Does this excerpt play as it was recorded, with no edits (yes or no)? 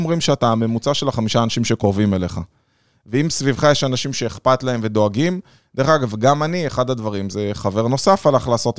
yes